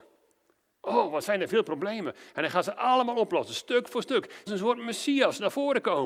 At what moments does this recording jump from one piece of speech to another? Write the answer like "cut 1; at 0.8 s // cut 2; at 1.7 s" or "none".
cut 1; at 4.5 s